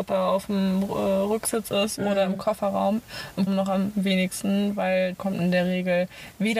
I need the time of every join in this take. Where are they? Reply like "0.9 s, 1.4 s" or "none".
3.5 s, 5.1 s